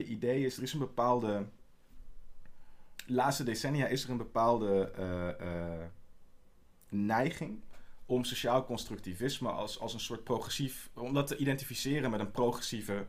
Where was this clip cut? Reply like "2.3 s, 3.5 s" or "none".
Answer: none